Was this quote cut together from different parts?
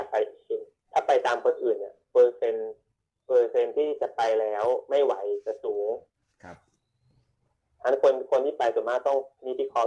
no; 0 cuts

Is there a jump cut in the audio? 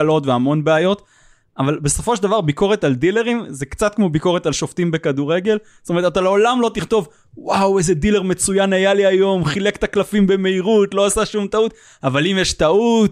no; 0 cuts

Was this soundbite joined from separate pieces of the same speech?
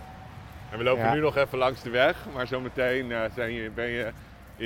no; 0 cuts

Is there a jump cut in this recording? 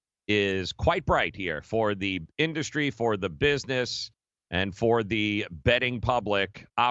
no; 0 cuts

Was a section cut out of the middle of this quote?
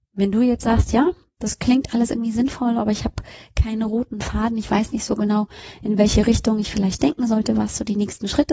no; 0 cuts

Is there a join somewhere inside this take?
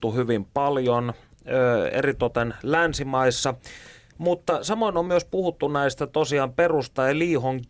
no; 0 cuts

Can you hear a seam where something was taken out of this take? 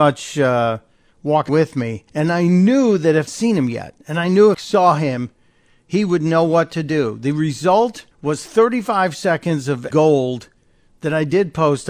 yes; 6 cuts; at 1.5 s, 2.1 s, 3.3 s, 4.5 s, 8.1 s, 9.9 s

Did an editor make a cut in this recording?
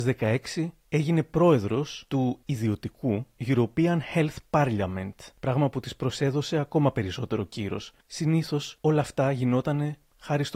no; 0 cuts

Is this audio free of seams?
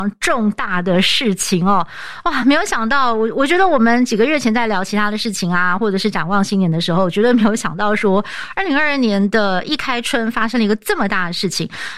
yes; 0 cuts

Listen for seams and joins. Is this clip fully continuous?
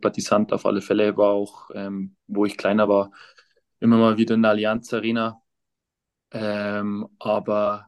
yes; 0 cuts

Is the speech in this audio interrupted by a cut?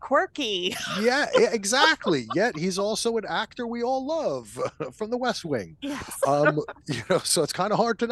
no; 0 cuts

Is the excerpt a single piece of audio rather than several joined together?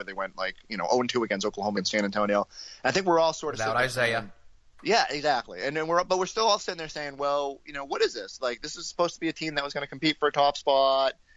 no; 1 cut; at 1.8 s

